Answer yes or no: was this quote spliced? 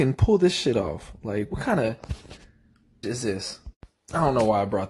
yes